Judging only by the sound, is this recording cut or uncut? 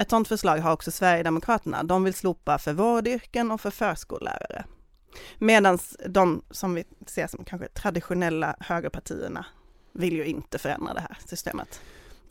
uncut